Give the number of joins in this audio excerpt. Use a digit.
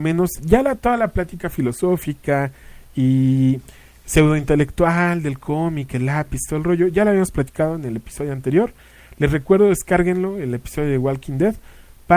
0